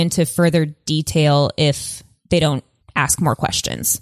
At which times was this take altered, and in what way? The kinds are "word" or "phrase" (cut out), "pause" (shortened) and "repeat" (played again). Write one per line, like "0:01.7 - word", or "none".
0:02.8 - pause